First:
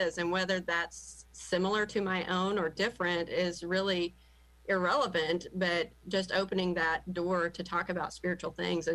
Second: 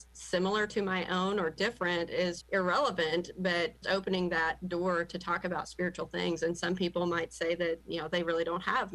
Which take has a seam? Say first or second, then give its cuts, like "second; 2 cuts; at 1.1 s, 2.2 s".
second; 2 cuts; at 2.4 s, 3.8 s